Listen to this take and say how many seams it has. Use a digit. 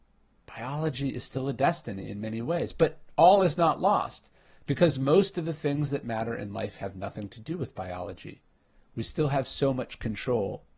0